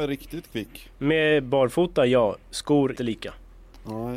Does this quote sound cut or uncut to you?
cut